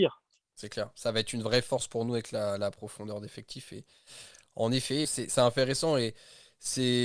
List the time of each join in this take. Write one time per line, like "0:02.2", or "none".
0:05.0